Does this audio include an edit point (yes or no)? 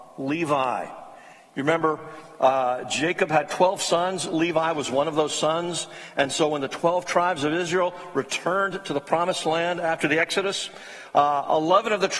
no